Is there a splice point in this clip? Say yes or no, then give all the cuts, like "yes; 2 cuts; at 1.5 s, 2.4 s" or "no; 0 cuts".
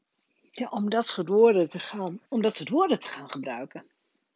yes; 1 cut; at 2.3 s